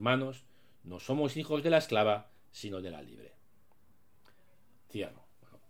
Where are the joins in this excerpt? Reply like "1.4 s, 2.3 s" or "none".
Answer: none